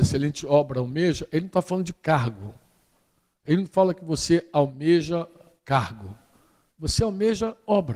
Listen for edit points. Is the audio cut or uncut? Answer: uncut